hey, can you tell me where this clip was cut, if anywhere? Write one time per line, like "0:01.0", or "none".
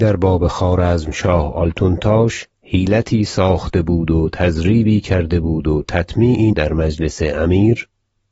0:02.5
0:06.5

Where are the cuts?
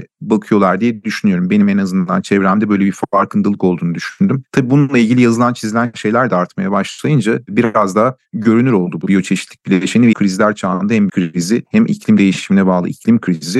0:09.0
0:10.1
0:11.1

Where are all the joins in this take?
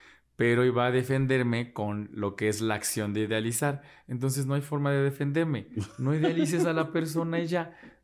none

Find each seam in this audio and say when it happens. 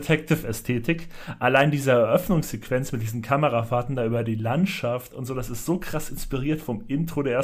none

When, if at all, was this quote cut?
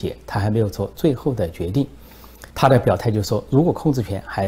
0:02.5

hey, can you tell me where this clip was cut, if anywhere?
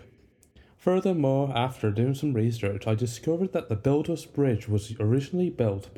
none

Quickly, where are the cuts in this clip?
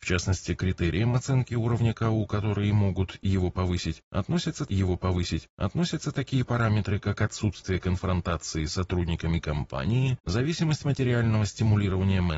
0:04.7

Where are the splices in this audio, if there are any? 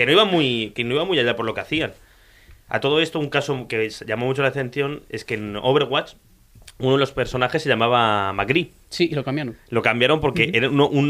none

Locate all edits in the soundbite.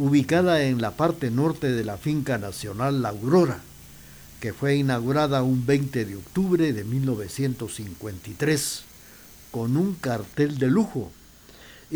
none

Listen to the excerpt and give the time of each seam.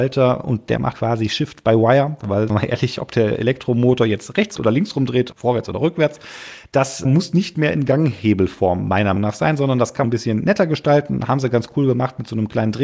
0:00.9
0:02.5
0:04.6
0:05.3
0:07.0
0:09.2
0:10.0

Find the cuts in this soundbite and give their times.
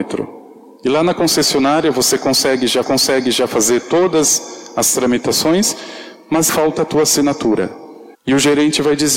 0:02.8
0:06.5
0:08.1

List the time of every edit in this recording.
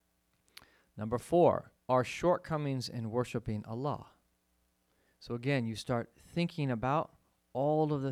0:01.8
0:04.8

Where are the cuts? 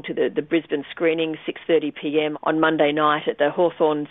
0:02.3

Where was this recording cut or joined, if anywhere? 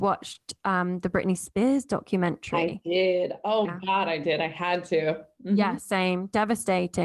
0:03.6

